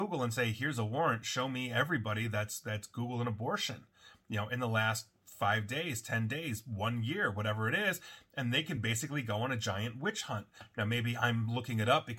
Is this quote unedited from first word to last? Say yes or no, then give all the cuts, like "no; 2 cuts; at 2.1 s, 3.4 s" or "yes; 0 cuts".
yes; 0 cuts